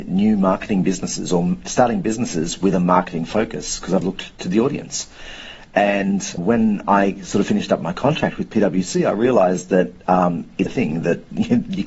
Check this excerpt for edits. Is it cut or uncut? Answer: cut